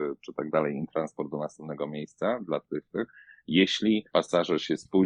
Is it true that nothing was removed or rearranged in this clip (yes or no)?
no